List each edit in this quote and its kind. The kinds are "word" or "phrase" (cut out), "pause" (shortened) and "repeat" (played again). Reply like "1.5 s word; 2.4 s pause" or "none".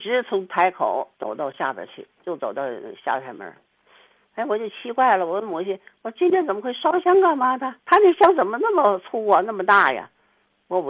1.1 s pause; 7.8 s pause